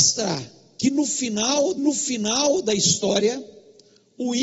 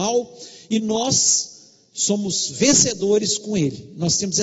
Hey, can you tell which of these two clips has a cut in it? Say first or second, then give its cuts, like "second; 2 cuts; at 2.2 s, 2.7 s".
first; 1 cut; at 1.8 s